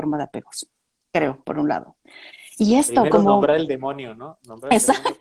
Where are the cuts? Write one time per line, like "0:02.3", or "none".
none